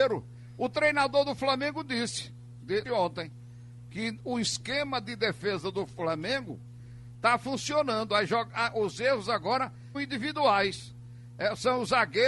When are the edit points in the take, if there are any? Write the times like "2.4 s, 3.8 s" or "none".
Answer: 2.8 s, 9.9 s